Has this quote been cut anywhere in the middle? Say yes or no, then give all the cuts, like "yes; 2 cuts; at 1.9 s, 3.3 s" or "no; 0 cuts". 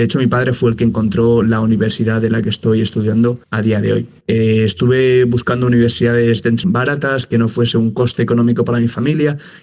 yes; 2 cuts; at 3.4 s, 6.6 s